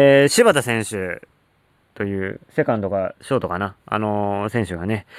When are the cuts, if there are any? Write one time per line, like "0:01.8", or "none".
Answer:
none

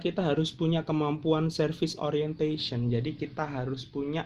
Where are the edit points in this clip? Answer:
none

